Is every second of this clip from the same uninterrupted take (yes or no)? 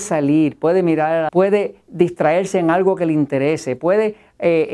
no